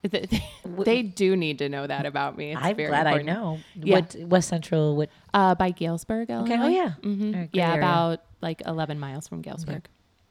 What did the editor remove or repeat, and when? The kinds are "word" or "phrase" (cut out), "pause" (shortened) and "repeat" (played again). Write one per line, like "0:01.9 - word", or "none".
none